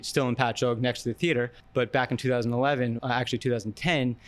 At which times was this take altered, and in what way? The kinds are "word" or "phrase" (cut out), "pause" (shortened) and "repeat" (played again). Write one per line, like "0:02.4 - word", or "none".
0:01.6 - pause
0:03.0 - word